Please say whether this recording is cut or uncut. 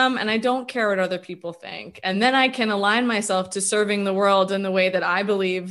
uncut